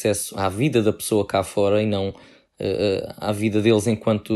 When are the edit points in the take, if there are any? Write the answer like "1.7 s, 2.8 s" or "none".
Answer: none